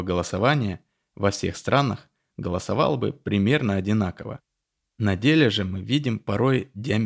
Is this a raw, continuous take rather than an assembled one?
yes; 0 cuts

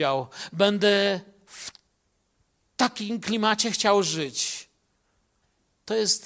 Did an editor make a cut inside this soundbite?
no; 0 cuts

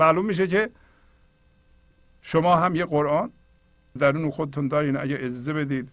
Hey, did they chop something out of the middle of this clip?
yes; 1 cut; at 4.0 s

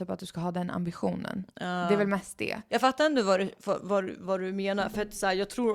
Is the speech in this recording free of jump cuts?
yes; 0 cuts

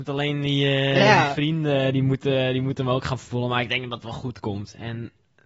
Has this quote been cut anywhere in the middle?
no; 0 cuts

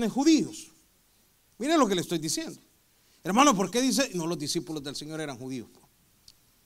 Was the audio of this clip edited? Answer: no; 0 cuts

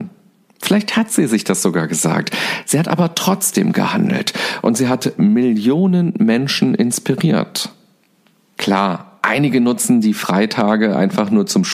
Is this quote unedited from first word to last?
yes; 0 cuts

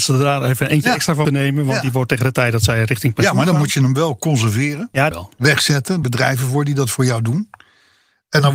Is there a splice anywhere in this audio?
yes; 3 cuts; at 1.2 s, 5.1 s, 6.0 s

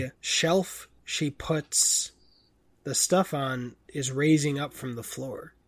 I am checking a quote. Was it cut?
no; 0 cuts

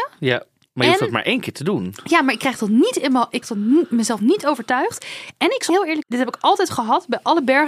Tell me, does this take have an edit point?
yes; 3 cuts; at 3.4 s, 5.7 s, 6.0 s

